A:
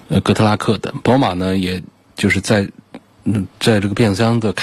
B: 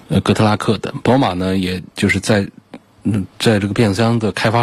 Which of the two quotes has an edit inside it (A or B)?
B